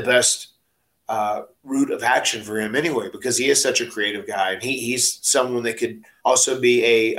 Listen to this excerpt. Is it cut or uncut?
cut